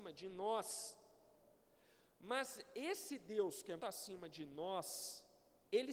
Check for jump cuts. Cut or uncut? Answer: cut